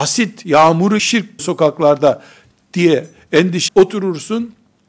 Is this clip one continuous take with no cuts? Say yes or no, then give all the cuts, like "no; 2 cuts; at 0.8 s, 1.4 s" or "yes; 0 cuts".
no; 3 cuts; at 1.0 s, 1.4 s, 3.7 s